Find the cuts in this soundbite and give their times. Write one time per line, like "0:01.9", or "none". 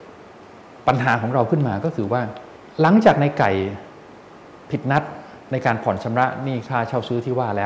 0:02.5
0:05.4